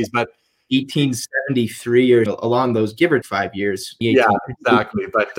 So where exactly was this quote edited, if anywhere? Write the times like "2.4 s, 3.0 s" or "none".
2.3 s, 3.2 s, 4.0 s

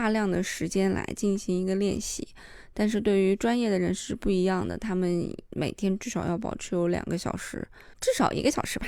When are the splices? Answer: 7.9 s

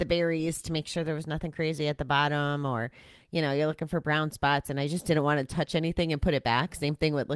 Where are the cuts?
none

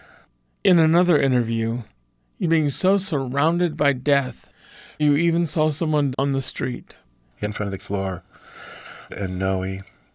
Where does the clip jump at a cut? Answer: 2.4 s, 5.0 s, 6.1 s, 7.4 s, 7.8 s, 9.1 s

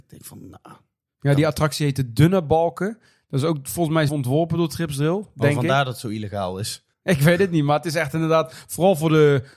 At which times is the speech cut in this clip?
4.1 s, 6.9 s

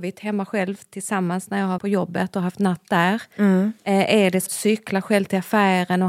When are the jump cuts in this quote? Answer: 1.8 s, 4.5 s

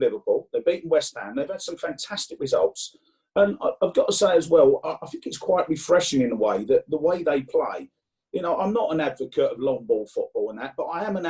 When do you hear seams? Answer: none

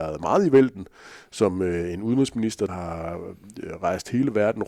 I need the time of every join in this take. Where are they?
2.7 s

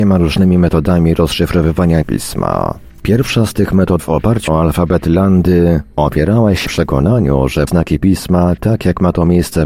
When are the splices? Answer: 2.0 s, 4.0 s, 4.5 s, 6.7 s, 7.7 s

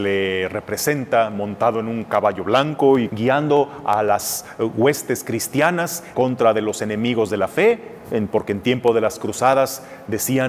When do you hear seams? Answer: 3.1 s, 6.1 s

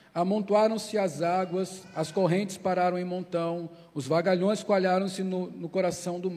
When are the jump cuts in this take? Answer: none

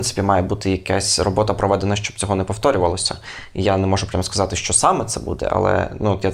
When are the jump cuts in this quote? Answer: none

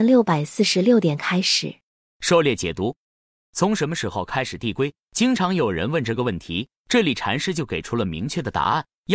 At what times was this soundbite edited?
none

